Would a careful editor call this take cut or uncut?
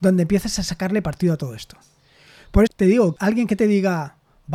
cut